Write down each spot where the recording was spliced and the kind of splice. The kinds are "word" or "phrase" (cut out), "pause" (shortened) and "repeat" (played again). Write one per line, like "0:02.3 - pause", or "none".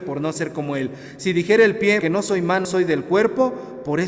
0:02.0 - word
0:02.6 - word